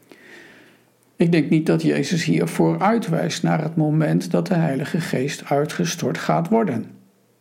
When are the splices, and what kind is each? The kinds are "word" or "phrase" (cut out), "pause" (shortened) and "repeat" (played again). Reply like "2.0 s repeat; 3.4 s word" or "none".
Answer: none